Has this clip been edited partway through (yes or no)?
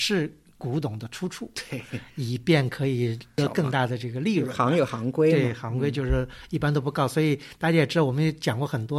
no